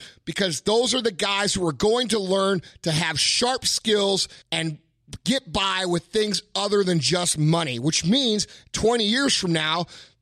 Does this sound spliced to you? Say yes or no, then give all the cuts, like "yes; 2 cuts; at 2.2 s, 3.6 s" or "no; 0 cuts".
yes; 1 cut; at 4.4 s